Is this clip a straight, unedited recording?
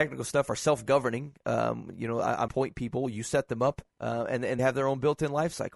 no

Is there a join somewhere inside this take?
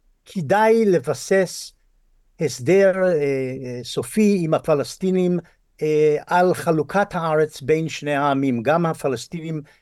no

